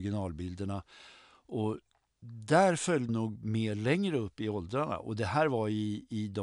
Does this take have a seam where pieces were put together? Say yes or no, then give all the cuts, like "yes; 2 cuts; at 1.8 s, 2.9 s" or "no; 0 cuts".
yes; 1 cut; at 3.1 s